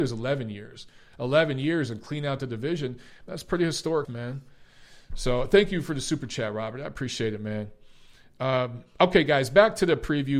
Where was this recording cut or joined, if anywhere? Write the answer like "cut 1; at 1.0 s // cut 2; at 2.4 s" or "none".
cut 1; at 4.0 s

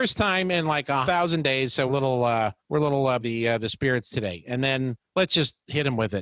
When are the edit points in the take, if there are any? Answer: cut 1; at 1.0 s // cut 2; at 1.9 s // cut 3; at 2.6 s // cut 4; at 3.2 s // cut 5; at 5.1 s

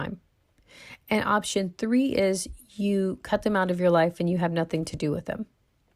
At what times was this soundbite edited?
none

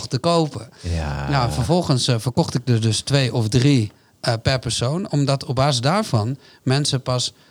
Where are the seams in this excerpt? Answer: none

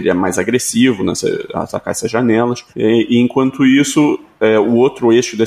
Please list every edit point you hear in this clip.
cut 1; at 2.7 s

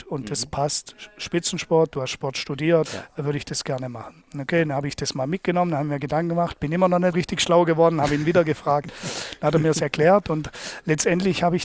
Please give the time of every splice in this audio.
cut 1; at 2.9 s // cut 2; at 7.1 s

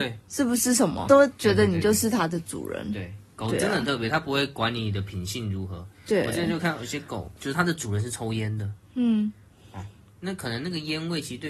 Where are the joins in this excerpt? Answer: cut 1; at 1.1 s // cut 2; at 7.4 s

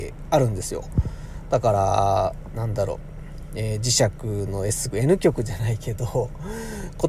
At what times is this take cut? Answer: cut 1; at 4.9 s

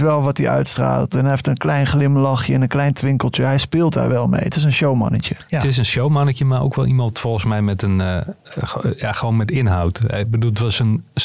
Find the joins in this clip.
none

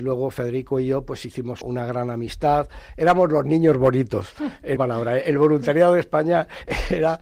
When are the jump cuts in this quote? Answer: cut 1; at 1.6 s // cut 2; at 4.8 s

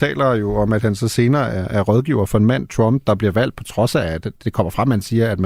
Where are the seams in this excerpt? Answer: none

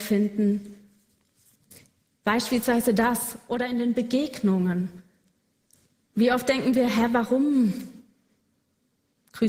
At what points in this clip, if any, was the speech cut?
none

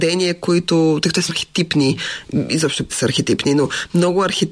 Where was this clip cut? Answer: cut 1; at 1.3 s // cut 2; at 2.9 s

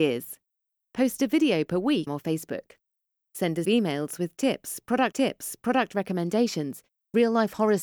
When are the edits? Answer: cut 1; at 2.1 s // cut 2; at 3.6 s // cut 3; at 5.1 s

